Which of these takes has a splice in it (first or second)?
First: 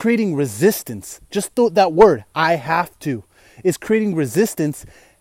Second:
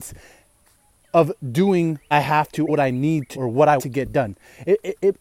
second